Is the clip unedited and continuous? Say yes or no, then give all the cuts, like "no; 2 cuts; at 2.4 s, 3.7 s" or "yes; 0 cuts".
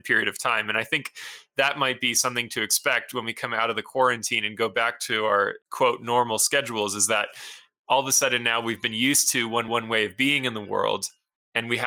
no; 2 cuts; at 5.6 s, 9.7 s